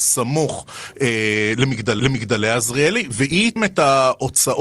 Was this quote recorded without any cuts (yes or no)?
no